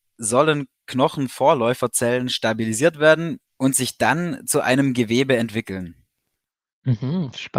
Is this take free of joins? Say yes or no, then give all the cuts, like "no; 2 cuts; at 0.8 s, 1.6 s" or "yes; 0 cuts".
no; 1 cut; at 3.5 s